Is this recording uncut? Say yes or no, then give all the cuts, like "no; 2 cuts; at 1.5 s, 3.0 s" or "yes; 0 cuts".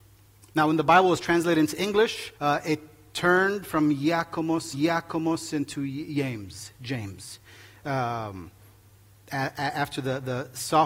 no; 2 cuts; at 2.4 s, 4.7 s